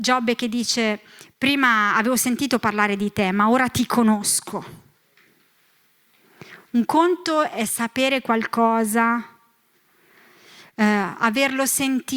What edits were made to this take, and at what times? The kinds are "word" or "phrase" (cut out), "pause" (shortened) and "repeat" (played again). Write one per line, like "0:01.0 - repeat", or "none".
none

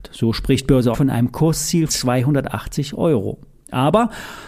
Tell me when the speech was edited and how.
0:00.9 - word
0:01.9 - word

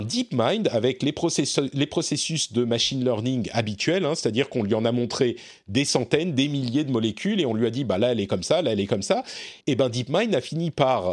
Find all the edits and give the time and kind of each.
0:09.6 - pause

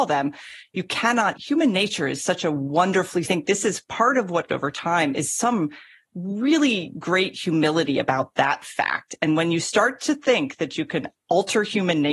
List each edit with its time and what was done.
0:01.3 - word
0:03.2 - phrase
0:04.5 - phrase

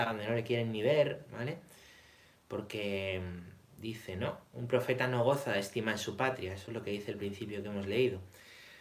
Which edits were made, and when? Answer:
none

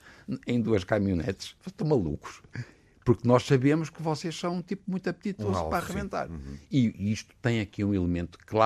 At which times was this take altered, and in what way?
none

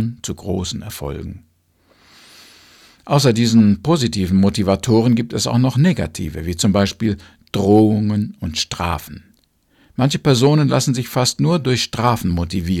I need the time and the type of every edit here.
none

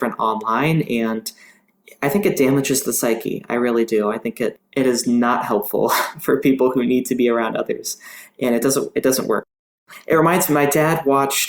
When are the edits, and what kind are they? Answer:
none

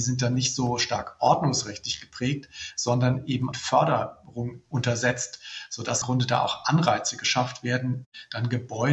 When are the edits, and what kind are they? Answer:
0:03.5 - phrase
0:06.0 - word

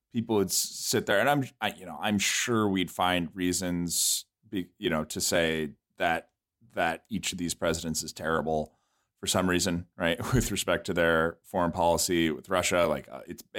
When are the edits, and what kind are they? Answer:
none

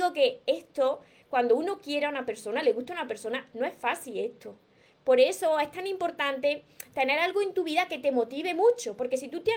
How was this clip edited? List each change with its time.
none

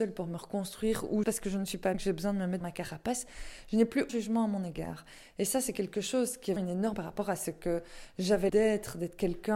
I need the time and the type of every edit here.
0:01.2 - word
0:01.9 - word
0:02.6 - word
0:04.1 - word
0:06.6 - word
0:06.9 - word
0:08.5 - word

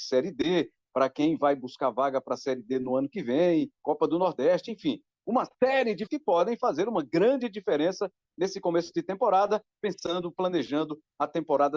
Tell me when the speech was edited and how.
0:03.8 - pause
0:05.5 - pause
0:06.1 - word

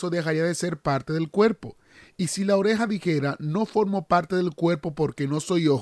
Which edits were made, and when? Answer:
none

